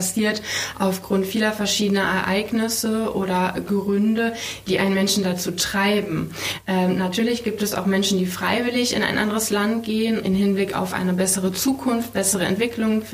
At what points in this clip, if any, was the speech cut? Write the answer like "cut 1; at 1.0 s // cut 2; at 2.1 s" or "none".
cut 1; at 10.2 s